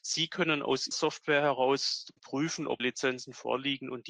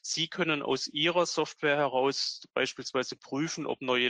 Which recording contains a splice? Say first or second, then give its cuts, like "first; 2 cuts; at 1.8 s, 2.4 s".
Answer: first; 3 cuts; at 0.9 s, 2.2 s, 2.8 s